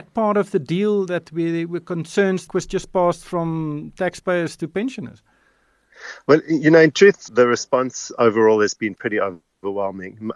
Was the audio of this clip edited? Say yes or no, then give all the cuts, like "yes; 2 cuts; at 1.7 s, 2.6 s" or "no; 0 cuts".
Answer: yes; 2 cuts; at 2.5 s, 7.3 s